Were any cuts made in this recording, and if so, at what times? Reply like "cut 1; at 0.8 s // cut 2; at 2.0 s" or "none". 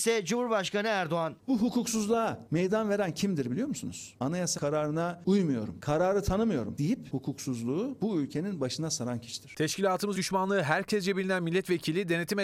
cut 1; at 4.5 s // cut 2; at 10.1 s